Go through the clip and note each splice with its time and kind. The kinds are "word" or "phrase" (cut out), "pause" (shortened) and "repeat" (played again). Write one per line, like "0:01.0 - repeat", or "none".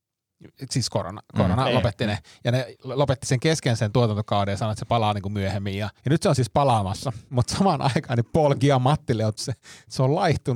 0:06.0 - pause
0:07.3 - pause
0:09.4 - word